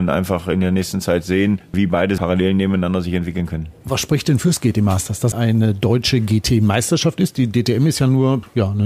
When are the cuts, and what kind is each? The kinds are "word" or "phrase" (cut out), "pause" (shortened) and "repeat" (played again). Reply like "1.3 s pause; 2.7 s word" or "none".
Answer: 2.2 s word; 5.3 s word